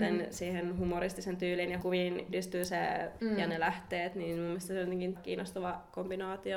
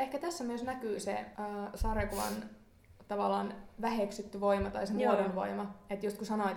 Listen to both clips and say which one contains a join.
first; 4 cuts; at 1.8 s, 2.3 s, 3.2 s, 5.1 s

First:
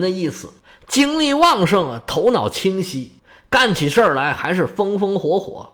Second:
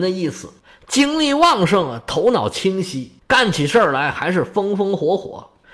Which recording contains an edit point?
second; 1 cut; at 3.2 s

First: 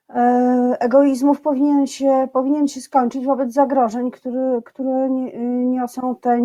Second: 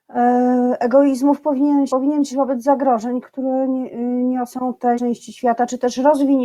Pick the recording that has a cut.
second; 4 cuts; at 1.9 s, 2.3 s, 3.2 s, 4.9 s

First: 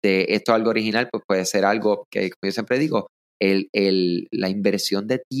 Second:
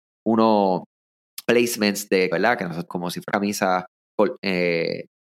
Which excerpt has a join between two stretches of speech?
second; 4 cuts; at 1.5 s, 2.3 s, 2.9 s, 3.3 s

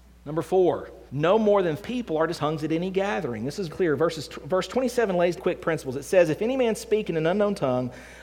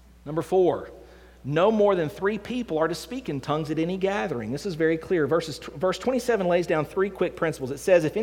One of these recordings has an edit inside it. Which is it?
first; 5 cuts; at 1.1 s, 1.8 s, 2.3 s, 3.7 s, 5.4 s

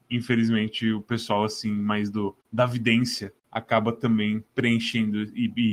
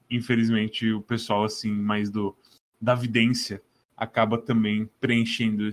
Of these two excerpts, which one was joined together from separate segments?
first; 2 cuts; at 2.4 s, 3.4 s

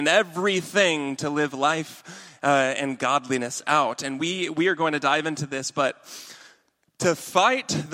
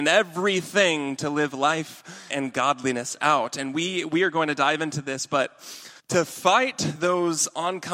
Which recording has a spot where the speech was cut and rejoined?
second; 2 cuts; at 2.3 s, 6.0 s

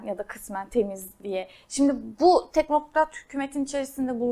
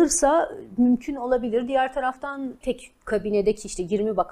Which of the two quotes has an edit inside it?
second; 1 cut; at 2.6 s

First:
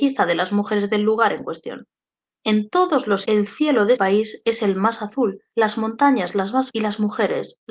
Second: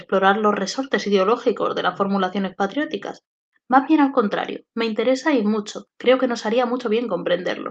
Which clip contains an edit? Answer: first; 3 cuts; at 3.2 s, 3.9 s, 6.7 s

